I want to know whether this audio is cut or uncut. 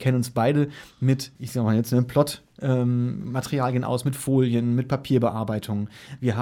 cut